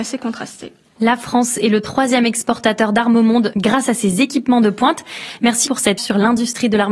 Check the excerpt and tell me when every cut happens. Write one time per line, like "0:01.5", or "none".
0:05.7
0:06.0